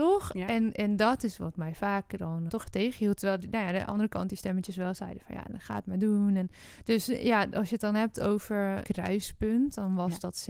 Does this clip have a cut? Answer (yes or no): yes